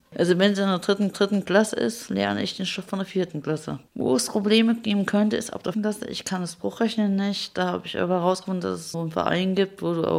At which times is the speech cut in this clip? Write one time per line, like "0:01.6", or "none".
0:01.1
0:05.7
0:08.9